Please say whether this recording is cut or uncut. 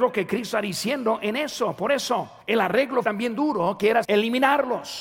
cut